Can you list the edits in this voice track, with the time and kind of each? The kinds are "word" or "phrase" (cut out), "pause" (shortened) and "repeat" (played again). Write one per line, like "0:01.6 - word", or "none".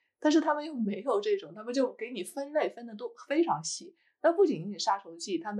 none